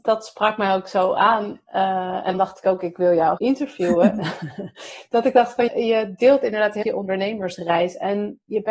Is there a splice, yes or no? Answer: yes